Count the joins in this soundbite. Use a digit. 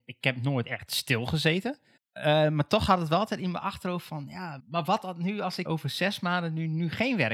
3